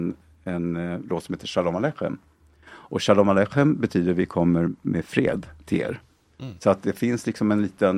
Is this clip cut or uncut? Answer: cut